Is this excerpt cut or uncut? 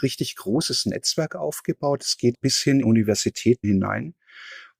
cut